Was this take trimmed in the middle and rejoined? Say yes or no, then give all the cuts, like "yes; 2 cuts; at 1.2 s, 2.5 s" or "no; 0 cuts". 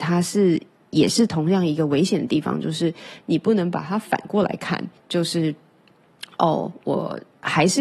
yes; 1 cut; at 5.0 s